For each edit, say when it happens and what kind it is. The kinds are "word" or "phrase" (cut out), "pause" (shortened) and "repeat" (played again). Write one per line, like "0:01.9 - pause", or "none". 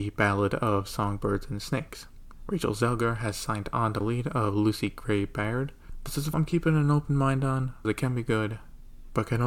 0:04.0 - phrase
0:06.3 - word
0:07.8 - word